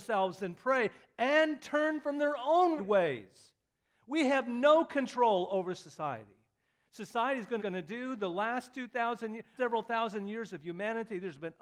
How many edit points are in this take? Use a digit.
3